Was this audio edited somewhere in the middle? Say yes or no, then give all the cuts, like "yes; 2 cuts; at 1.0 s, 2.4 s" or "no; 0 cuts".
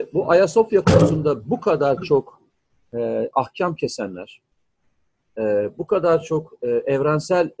no; 0 cuts